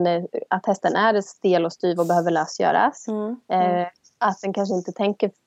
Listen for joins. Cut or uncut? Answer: uncut